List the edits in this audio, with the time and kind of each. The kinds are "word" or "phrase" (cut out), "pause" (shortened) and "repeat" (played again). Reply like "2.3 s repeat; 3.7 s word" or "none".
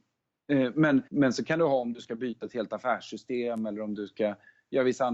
1.1 s pause